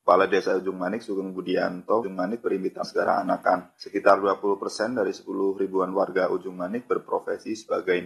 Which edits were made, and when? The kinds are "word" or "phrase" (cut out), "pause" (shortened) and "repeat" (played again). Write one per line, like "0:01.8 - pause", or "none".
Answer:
0:02.0 - phrase
0:02.8 - phrase